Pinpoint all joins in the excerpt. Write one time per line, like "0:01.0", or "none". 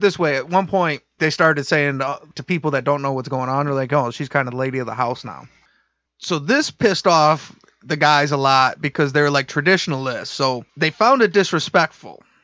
0:10.7